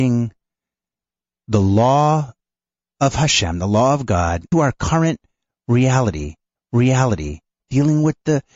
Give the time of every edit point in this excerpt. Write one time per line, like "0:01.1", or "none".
0:04.5
0:06.6

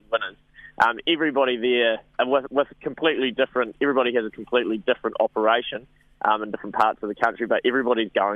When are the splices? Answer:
none

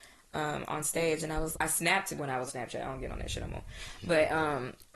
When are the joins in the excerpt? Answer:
0:01.5
0:02.2
0:02.5

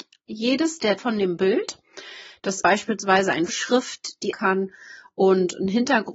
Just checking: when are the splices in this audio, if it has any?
0:01.0
0:02.6
0:03.5
0:04.3

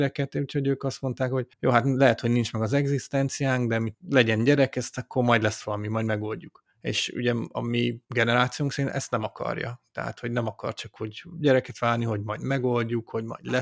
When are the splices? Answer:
0:01.5
0:03.9
0:08.0

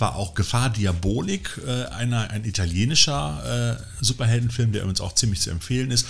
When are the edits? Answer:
none

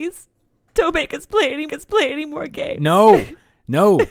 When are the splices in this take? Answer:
0:01.7

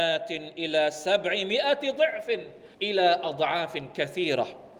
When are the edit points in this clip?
0:02.7

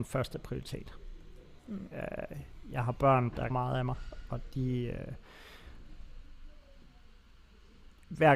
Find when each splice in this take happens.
0:03.5

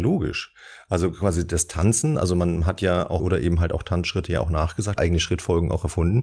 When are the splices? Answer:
0:03.2
0:05.0

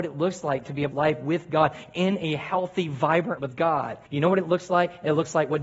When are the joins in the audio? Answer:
0:00.9
0:03.4
0:04.0

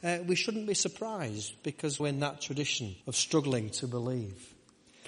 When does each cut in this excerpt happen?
0:02.0
0:03.0

